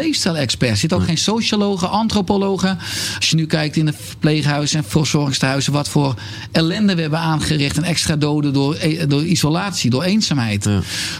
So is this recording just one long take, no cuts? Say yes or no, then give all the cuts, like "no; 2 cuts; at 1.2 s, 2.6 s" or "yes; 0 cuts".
yes; 0 cuts